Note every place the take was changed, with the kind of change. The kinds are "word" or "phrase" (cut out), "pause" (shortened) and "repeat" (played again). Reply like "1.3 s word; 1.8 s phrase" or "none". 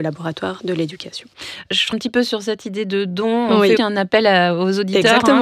1.9 s word; 3.8 s word

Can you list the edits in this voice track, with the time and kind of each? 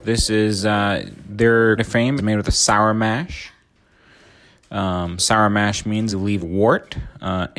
1.8 s word; 2.2 s word; 5.2 s word; 6.1 s word; 6.4 s word

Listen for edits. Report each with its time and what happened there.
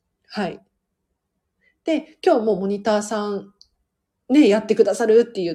none

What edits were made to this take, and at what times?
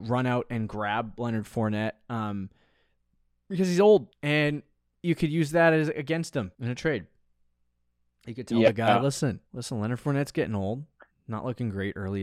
4.1 s pause; 6.5 s pause; 9.5 s pause

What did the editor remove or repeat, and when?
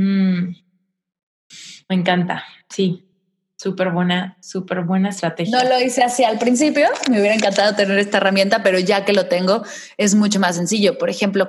none

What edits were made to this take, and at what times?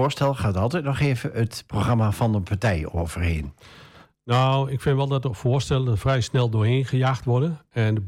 none

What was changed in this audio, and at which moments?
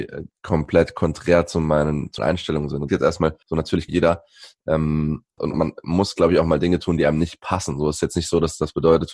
2.2 s word; 2.9 s phrase; 3.4 s pause; 3.9 s phrase; 5.4 s word

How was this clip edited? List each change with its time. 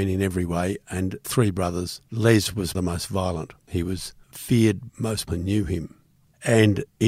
1.2 s phrase; 2.1 s pause; 2.7 s phrase; 4.9 s word; 5.3 s word

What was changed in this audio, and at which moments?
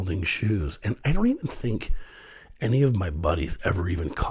none

